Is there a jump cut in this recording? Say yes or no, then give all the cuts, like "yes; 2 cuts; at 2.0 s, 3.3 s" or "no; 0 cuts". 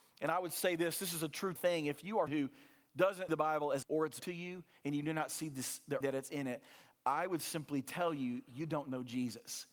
yes; 6 cuts; at 1.6 s, 2.3 s, 3.3 s, 3.8 s, 4.2 s, 6.0 s